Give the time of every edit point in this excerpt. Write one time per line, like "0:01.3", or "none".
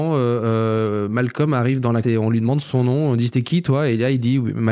0:02.0